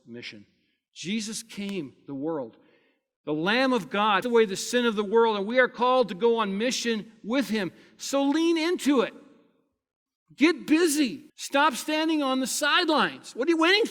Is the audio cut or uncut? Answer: cut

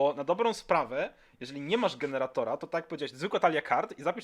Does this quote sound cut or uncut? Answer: uncut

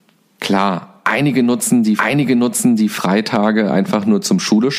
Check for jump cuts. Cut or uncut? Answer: cut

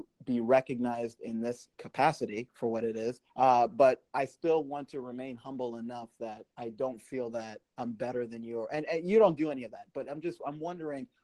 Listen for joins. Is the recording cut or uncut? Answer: cut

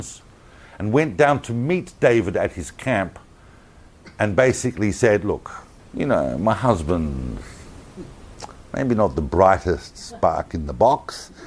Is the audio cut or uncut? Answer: cut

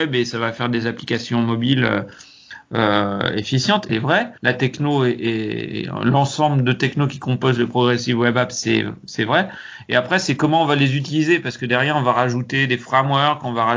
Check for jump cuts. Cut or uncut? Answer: cut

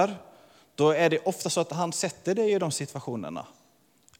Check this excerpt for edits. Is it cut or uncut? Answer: uncut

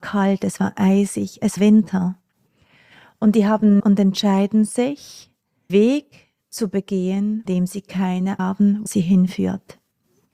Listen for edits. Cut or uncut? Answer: cut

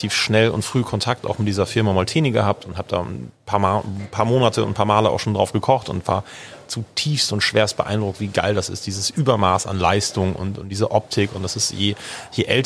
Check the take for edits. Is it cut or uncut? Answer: uncut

